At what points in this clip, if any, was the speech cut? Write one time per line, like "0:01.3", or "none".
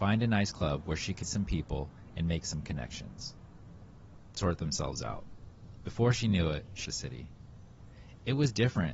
0:01.2
0:04.3
0:06.8